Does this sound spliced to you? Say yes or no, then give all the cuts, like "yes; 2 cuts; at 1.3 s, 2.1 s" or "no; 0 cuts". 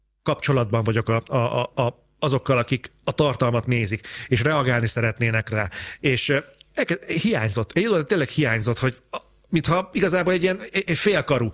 no; 0 cuts